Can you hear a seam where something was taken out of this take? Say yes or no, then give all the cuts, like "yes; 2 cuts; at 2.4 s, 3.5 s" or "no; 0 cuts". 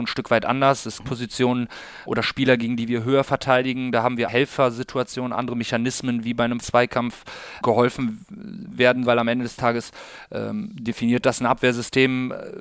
yes; 6 cuts; at 1.0 s, 2.1 s, 4.3 s, 6.6 s, 7.6 s, 9.1 s